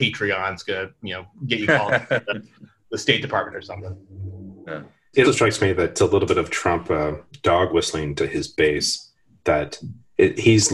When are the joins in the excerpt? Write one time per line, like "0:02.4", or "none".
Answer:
0:05.2